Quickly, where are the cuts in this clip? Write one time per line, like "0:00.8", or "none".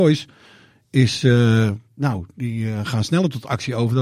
none